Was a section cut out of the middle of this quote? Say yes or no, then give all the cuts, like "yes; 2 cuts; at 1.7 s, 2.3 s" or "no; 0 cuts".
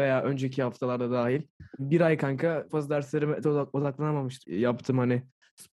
yes; 4 cuts; at 1.8 s, 2.7 s, 3.4 s, 4.4 s